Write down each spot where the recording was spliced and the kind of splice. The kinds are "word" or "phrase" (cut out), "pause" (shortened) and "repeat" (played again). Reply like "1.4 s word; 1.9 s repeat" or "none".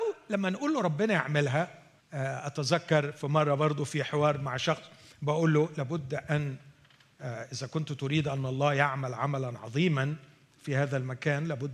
2.0 s pause